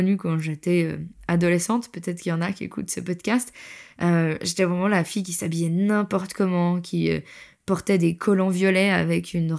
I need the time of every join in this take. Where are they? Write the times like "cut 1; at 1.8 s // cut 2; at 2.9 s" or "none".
none